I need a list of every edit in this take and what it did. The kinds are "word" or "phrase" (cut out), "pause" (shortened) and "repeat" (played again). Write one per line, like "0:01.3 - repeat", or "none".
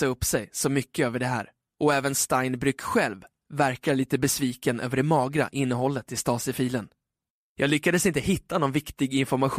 0:01.7 - pause
0:07.3 - pause